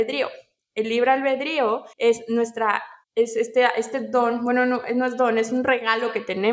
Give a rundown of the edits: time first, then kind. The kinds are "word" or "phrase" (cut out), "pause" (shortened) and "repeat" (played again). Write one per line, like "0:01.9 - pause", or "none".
0:01.9 - pause
0:03.0 - pause